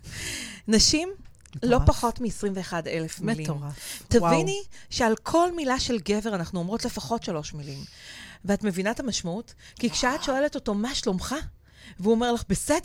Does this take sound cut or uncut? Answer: uncut